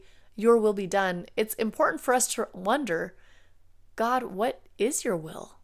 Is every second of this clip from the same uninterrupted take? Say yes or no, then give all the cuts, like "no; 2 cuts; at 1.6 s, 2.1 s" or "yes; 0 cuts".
yes; 0 cuts